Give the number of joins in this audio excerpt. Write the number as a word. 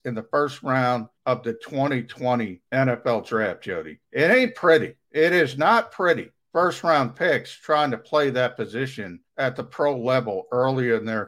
six